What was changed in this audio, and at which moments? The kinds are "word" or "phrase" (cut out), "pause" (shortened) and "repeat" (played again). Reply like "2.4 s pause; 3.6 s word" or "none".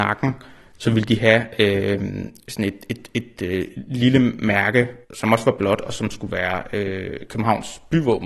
5.0 s pause

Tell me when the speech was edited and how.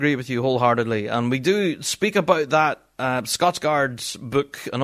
none

